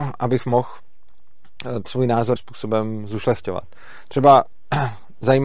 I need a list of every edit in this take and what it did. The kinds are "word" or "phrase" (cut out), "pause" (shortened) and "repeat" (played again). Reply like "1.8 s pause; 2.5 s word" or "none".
1.8 s word; 2.4 s word

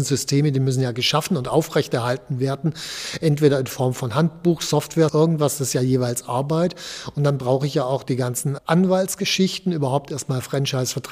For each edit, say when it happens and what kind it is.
5.1 s word; 8.0 s word; 8.6 s word

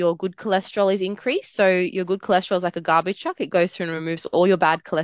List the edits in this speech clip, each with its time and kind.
none

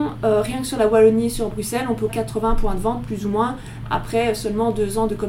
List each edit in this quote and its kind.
2.1 s phrase

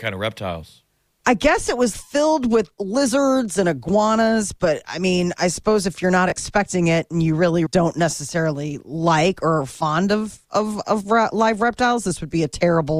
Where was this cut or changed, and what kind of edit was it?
1.9 s word; 2.7 s pause; 7.7 s word

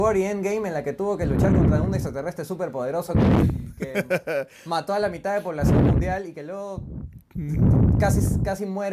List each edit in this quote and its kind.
none

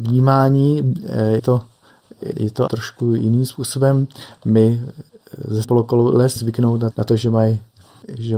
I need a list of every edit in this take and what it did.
1.4 s word; 2.3 s word; 2.7 s word; 5.6 s word; 6.4 s word; 6.9 s word

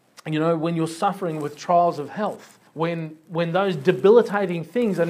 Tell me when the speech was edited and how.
2.7 s pause

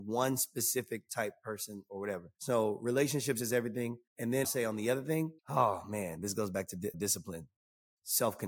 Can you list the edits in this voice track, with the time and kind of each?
2.3 s pause; 4.1 s pause; 4.4 s word; 5.4 s pause; 6.9 s word

